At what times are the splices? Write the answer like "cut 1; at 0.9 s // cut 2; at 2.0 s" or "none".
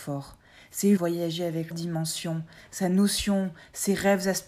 cut 1; at 1.0 s // cut 2; at 1.7 s